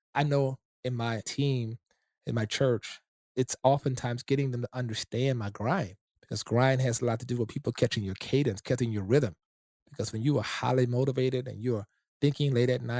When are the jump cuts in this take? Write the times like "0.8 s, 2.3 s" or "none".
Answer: none

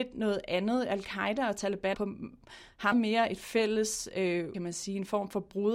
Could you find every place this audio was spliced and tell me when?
1.9 s, 2.9 s, 4.5 s

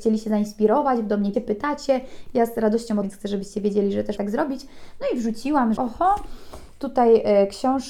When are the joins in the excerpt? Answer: 1.3 s, 3.0 s, 4.2 s, 5.8 s

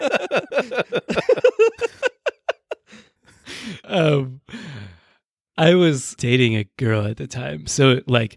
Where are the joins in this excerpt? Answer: 3.8 s, 6.2 s

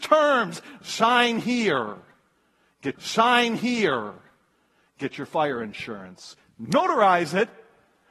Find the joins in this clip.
2.9 s

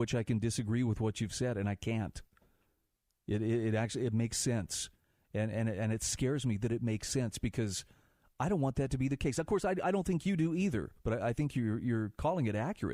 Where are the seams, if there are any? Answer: 11.0 s

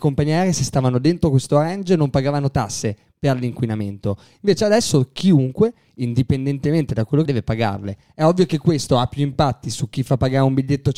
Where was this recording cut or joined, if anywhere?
7.3 s

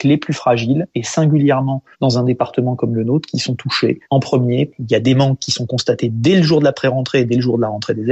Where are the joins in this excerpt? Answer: 1.9 s, 4.0 s

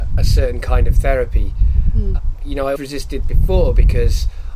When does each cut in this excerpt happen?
2.8 s, 3.2 s

